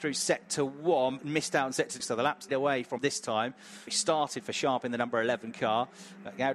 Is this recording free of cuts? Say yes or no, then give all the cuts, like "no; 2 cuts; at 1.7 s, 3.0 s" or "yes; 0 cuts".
no; 6 cuts; at 1.2 s, 2.0 s, 2.5 s, 3.0 s, 3.9 s, 4.4 s